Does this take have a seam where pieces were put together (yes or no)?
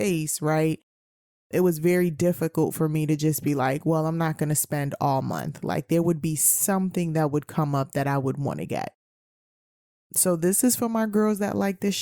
no